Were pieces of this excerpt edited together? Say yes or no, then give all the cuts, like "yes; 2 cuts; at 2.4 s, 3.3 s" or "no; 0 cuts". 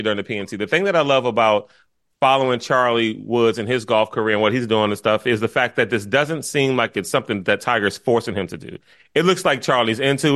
no; 0 cuts